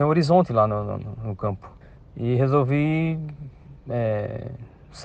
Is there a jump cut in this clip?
yes; 1 cut; at 1.8 s

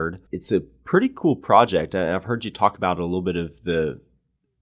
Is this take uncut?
yes; 0 cuts

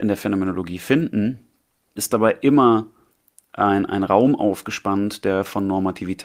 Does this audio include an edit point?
yes; 1 cut; at 2.0 s

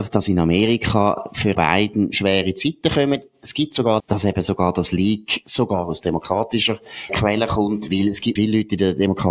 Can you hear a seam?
yes; 4 cuts; at 1.5 s, 4.0 s, 7.1 s, 8.4 s

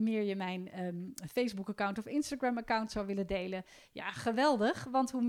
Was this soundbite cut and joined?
no; 0 cuts

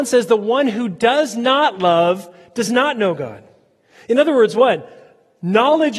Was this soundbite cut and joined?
no; 0 cuts

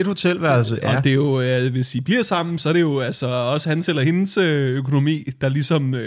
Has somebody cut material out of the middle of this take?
no; 0 cuts

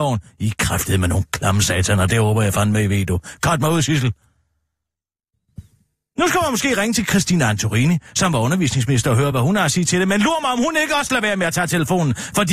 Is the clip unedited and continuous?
yes; 0 cuts

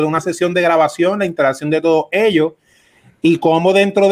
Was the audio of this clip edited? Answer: no; 0 cuts

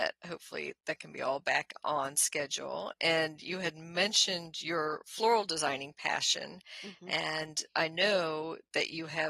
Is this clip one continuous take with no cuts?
yes; 0 cuts

